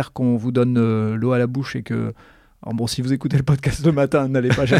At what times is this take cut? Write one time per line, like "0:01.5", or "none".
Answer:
none